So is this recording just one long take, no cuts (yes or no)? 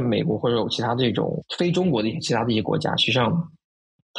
no